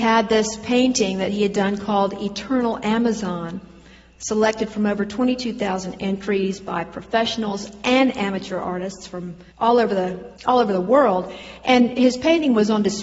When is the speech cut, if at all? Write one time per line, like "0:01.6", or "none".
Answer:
0:09.5
0:10.4